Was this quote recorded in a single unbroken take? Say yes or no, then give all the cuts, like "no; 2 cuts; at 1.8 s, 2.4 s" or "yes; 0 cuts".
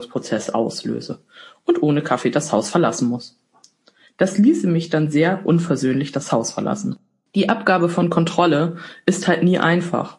yes; 0 cuts